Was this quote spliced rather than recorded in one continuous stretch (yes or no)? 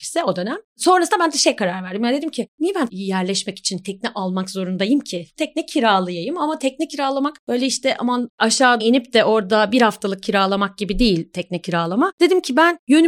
yes